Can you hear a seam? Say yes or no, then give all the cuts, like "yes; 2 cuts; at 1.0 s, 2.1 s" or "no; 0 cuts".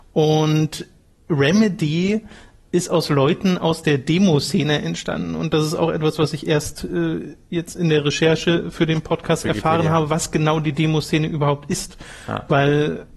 no; 0 cuts